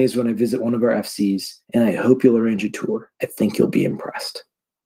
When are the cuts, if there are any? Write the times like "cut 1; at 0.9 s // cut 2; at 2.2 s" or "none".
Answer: cut 1; at 1.6 s // cut 2; at 3.1 s

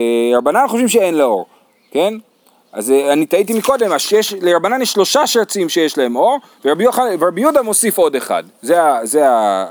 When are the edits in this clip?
none

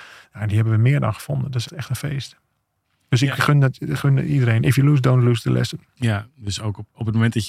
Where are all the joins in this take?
cut 1; at 1.6 s

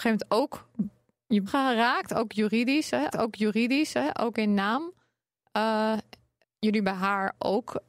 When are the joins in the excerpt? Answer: cut 1; at 1.5 s // cut 2; at 3.1 s // cut 3; at 6.4 s

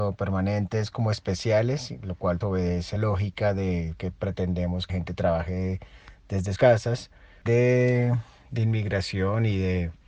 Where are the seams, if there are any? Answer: cut 1; at 2.4 s // cut 2; at 3.0 s // cut 3; at 4.0 s // cut 4; at 4.9 s // cut 5; at 6.6 s // cut 6; at 7.5 s

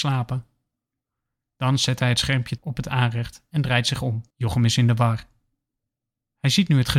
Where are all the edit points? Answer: cut 1; at 2.6 s // cut 2; at 4.3 s

